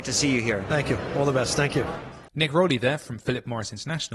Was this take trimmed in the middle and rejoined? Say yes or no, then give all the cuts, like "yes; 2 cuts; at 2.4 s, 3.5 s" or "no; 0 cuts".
yes; 1 cut; at 2.3 s